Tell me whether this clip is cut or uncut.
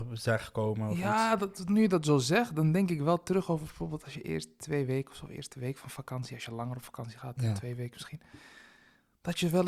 uncut